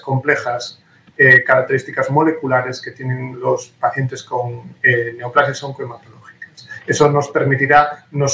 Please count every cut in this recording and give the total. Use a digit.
0